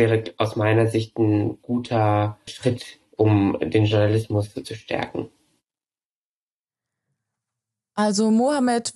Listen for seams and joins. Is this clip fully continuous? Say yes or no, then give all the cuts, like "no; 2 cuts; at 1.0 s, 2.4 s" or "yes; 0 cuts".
no; 2 cuts; at 2.5 s, 4.6 s